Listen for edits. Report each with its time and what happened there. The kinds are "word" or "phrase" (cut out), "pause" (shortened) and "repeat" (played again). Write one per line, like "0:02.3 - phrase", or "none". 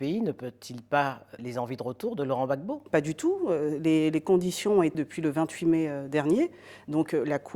0:01.4 - word
0:04.9 - word